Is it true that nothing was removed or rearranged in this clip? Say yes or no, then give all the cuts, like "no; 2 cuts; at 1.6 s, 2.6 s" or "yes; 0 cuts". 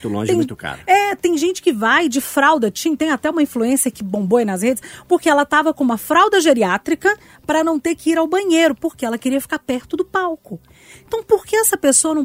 yes; 0 cuts